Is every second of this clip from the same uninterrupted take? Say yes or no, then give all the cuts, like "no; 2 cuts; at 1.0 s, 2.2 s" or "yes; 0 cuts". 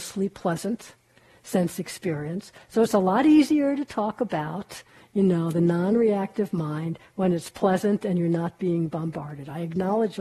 yes; 0 cuts